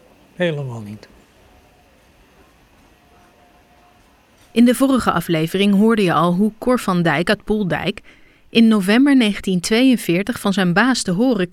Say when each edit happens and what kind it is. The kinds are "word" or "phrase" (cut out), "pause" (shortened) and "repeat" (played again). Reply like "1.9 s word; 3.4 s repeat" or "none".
none